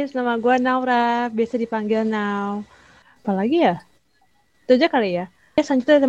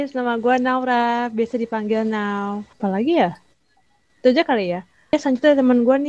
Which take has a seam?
second; 1 cut; at 2.7 s

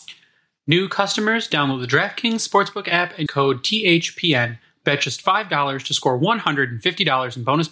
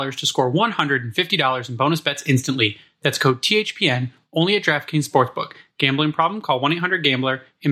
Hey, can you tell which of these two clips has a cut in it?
first; 1 cut; at 3.3 s

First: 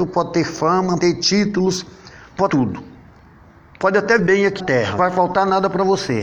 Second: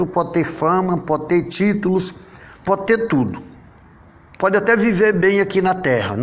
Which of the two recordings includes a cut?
first; 5 cuts; at 1.0 s, 2.5 s, 4.2 s, 4.6 s, 5.0 s

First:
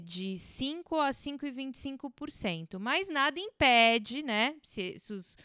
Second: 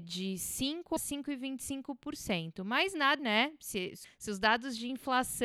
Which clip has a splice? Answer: second; 3 cuts; at 1.0 s, 3.2 s, 4.0 s

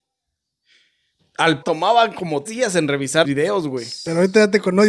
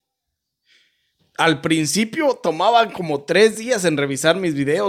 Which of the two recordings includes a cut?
first; 3 cuts; at 1.6 s, 2.5 s, 3.2 s

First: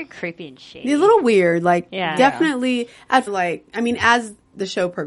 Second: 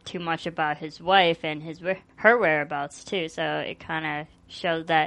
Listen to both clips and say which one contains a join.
first; 1 cut; at 3.3 s

